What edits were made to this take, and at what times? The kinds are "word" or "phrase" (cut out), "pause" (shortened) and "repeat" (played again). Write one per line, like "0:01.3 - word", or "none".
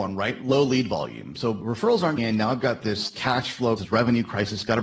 0:02.2 - word
0:03.8 - word